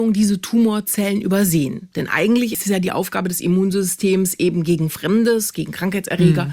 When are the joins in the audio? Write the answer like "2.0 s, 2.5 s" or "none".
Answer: none